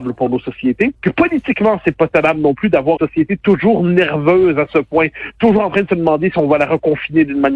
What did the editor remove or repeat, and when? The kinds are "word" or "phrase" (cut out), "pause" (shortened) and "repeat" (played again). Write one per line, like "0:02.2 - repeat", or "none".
0:01.0 - pause
0:03.0 - word

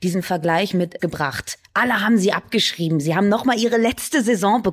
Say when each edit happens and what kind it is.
0:01.0 - phrase

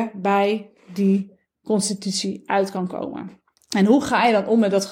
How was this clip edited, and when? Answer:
0:03.6 - pause

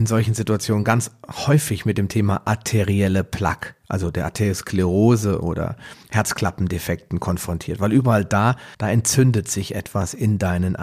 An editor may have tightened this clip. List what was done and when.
0:06.0 - pause
0:08.7 - pause

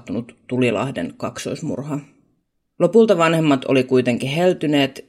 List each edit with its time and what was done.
none

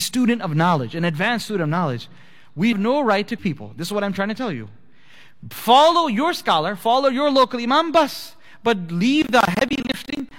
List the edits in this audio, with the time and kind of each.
0:02.7 - word
0:03.4 - word

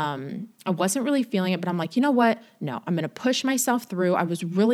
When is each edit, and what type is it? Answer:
none

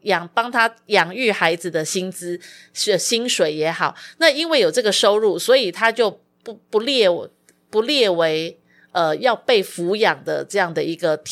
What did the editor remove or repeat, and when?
none

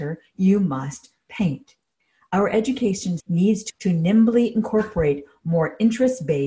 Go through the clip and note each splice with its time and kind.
0:03.2 - word
0:03.7 - word

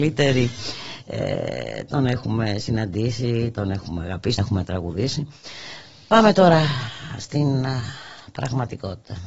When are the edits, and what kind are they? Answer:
0:04.4 - word

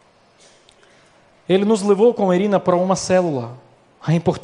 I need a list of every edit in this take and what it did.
none

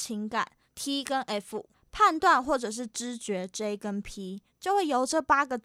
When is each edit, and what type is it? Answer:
none

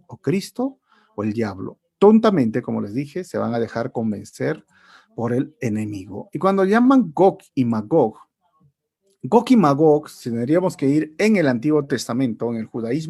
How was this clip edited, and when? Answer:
none

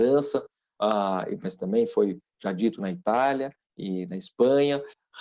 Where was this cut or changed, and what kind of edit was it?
none

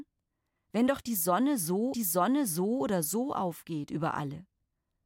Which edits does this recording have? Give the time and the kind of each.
0:01.9 - repeat

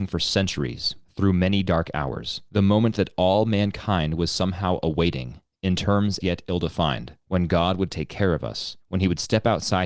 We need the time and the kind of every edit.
0:01.0 - pause
0:02.5 - pause
0:06.2 - word
0:07.2 - pause
0:08.8 - pause

